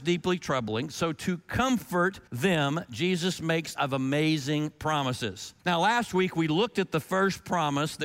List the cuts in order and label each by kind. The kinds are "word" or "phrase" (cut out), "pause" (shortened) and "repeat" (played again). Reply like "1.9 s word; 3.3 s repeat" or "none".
2.3 s pause; 3.7 s phrase; 5.6 s pause